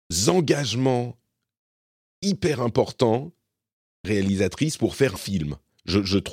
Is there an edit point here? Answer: yes; 2 cuts; at 4.0 s, 5.2 s

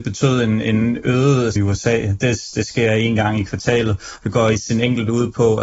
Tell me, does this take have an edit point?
yes; 1 cut; at 1.6 s

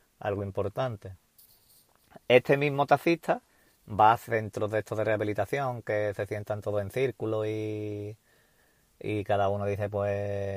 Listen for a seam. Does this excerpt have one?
no; 0 cuts

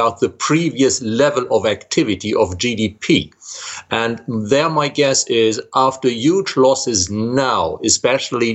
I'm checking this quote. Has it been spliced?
no; 0 cuts

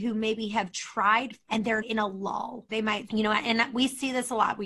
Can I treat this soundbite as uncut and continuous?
no; 4 cuts; at 1.5 s, 1.8 s, 2.7 s, 3.1 s

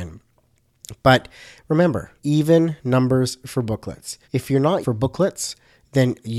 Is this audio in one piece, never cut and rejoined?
no; 3 cuts; at 2.2 s, 4.2 s, 4.8 s

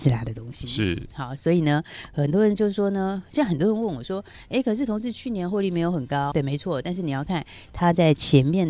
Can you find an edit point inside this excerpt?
yes; 1 cut; at 6.3 s

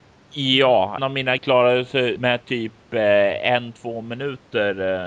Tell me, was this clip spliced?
yes; 3 cuts; at 1.0 s, 1.4 s, 2.2 s

